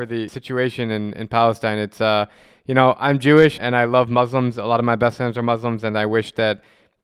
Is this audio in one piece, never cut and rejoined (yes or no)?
no